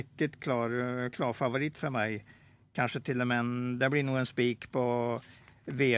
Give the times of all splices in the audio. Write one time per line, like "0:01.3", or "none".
none